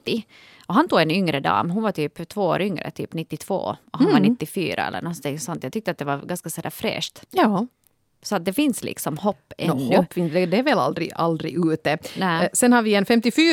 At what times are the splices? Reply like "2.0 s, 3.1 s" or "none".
7.3 s